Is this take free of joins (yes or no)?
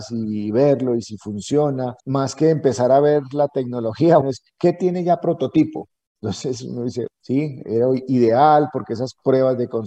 no